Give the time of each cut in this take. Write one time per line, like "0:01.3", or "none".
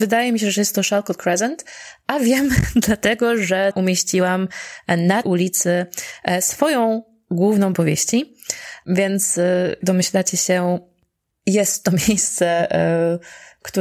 0:03.7
0:05.2
0:07.7
0:09.8